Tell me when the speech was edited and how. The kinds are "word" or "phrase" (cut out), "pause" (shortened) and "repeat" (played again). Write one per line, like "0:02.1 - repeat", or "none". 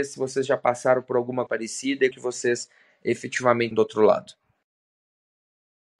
0:01.5 - word
0:02.1 - word
0:03.7 - word